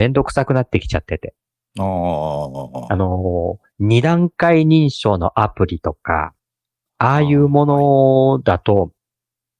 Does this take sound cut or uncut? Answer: uncut